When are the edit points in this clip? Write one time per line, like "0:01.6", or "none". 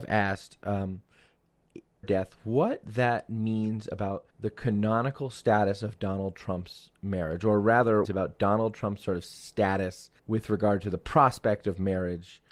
0:02.0
0:04.3
0:08.0
0:10.2